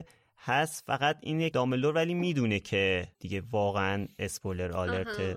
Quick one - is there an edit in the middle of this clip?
yes; 2 cuts; at 1.5 s, 3.1 s

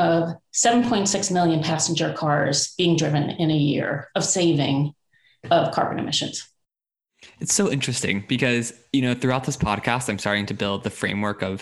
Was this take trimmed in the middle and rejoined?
no; 0 cuts

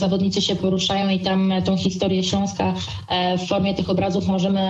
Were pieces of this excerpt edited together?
no; 0 cuts

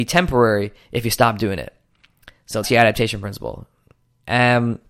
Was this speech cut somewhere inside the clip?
yes; 1 cut; at 2.6 s

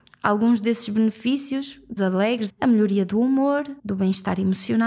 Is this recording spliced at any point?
yes; 3 cuts; at 2.0 s, 2.5 s, 3.8 s

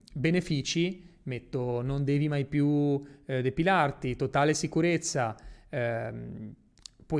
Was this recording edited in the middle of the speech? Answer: no; 0 cuts

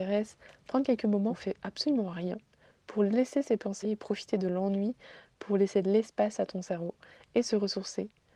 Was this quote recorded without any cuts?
no; 2 cuts; at 1.3 s, 3.8 s

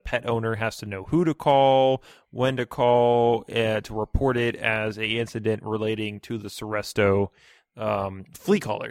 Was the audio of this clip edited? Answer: no; 0 cuts

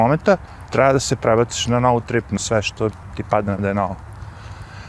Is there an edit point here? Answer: yes; 3 cuts; at 2.0 s, 2.4 s, 3.6 s

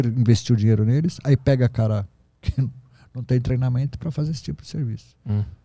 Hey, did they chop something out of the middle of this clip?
no; 0 cuts

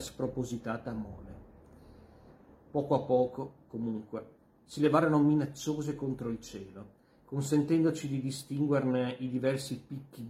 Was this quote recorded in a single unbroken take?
yes; 0 cuts

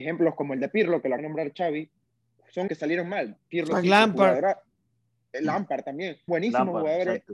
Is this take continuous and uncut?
no; 3 cuts; at 1.2 s, 2.7 s, 6.3 s

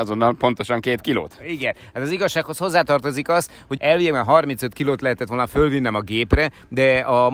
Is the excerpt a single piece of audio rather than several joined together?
no; 1 cut; at 3.8 s

